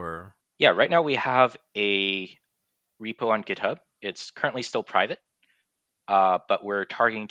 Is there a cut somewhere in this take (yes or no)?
no